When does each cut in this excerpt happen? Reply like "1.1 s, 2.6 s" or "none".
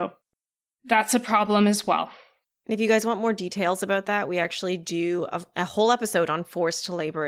none